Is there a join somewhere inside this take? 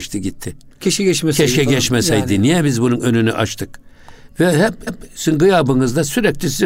yes; 1 cut; at 4.9 s

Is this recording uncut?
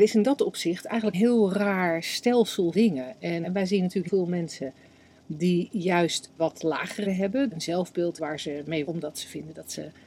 no; 9 cuts; at 1.1 s, 2.7 s, 3.4 s, 4.1 s, 6.4 s, 7.0 s, 7.5 s, 8.2 s, 8.9 s

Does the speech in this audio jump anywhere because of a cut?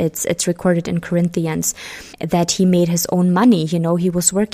yes; 1 cut; at 2.1 s

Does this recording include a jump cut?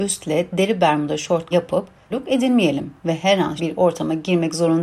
yes; 4 cuts; at 1.5 s, 2.1 s, 3.0 s, 3.6 s

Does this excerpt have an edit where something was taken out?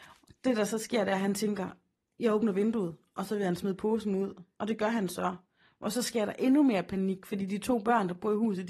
no; 0 cuts

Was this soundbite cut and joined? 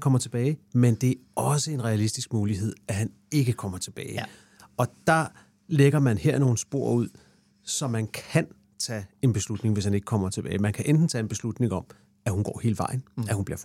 no; 0 cuts

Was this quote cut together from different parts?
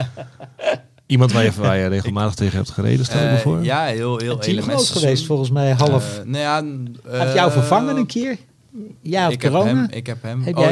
no; 0 cuts

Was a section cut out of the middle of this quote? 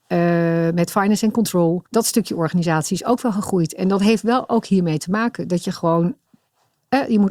yes; 1 cut; at 1.9 s

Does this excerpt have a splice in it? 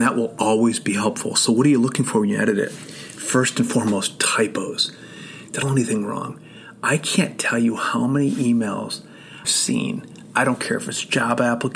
yes; 2 cuts; at 5.6 s, 9.4 s

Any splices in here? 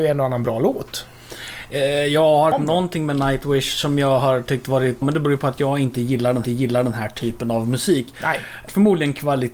yes; 3 cuts; at 2.5 s, 5.0 s, 6.4 s

